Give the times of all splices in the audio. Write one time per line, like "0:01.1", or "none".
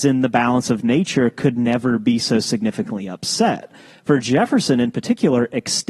none